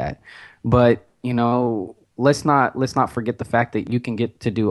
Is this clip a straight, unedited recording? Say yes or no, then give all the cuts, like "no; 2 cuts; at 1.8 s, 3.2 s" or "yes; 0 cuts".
yes; 0 cuts